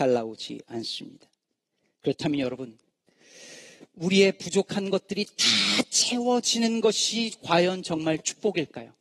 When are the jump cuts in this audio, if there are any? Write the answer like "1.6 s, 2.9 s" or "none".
none